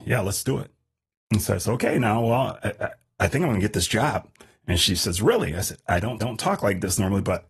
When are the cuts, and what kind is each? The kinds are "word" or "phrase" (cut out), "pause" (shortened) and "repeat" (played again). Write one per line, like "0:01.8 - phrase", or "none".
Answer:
0:06.2 - repeat